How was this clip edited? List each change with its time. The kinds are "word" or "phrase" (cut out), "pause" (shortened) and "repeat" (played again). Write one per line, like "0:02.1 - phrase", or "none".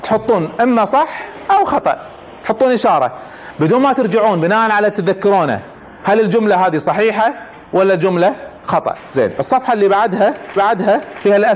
0:10.6 - repeat